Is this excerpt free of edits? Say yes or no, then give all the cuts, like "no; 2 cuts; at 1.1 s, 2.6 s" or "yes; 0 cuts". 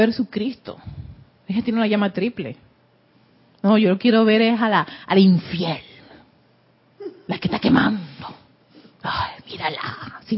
yes; 0 cuts